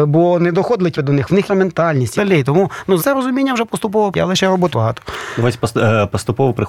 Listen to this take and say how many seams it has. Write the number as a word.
six